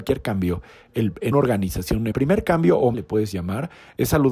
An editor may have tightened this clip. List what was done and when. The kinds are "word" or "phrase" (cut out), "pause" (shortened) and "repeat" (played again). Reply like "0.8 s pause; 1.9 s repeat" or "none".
1.3 s word; 2.1 s phrase; 2.9 s word